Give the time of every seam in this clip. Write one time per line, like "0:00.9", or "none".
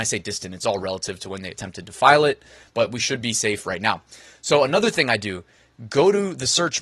none